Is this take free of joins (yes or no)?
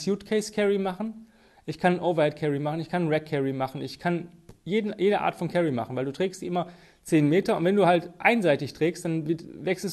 yes